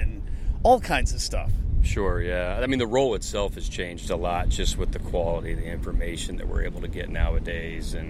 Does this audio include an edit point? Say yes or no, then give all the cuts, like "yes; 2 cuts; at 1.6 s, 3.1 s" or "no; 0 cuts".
no; 0 cuts